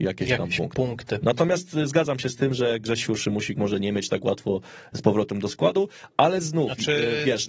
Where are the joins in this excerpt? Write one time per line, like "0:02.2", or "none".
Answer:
none